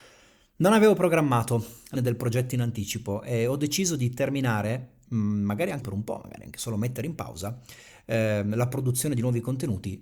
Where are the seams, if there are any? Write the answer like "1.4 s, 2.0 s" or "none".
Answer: 1.9 s, 5.8 s